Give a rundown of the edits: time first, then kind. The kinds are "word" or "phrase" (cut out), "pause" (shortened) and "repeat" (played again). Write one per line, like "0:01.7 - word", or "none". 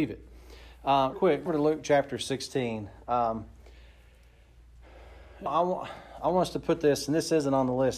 0:01.1 - word
0:01.5 - word
0:05.5 - word